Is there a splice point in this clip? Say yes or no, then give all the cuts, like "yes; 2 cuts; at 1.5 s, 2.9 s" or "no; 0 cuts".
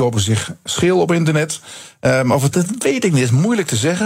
yes; 1 cut; at 2.5 s